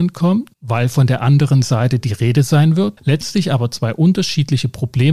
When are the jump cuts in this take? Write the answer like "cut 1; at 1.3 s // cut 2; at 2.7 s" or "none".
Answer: none